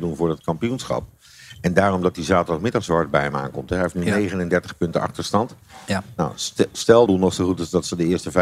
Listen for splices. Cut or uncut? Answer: cut